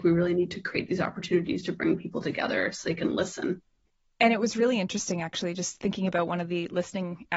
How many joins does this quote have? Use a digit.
0